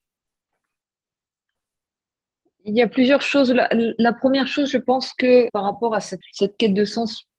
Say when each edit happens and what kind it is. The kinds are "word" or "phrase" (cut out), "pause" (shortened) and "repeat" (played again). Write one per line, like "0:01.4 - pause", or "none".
0:05.5 - word
0:06.2 - word